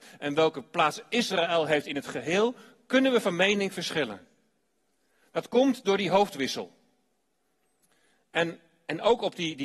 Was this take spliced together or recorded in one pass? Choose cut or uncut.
uncut